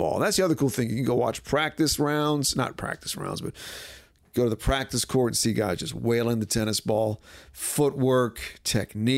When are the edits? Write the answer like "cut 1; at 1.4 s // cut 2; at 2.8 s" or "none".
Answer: none